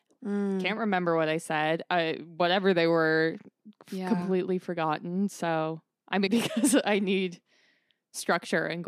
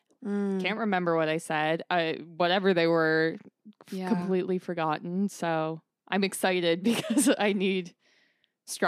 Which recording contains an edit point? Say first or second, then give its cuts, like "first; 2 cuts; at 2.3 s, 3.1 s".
first; 1 cut; at 6.3 s